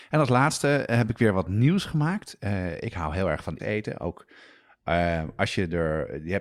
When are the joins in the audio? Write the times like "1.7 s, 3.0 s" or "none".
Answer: 3.6 s